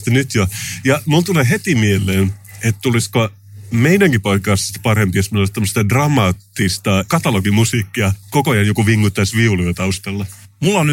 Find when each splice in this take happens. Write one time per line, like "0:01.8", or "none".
0:08.2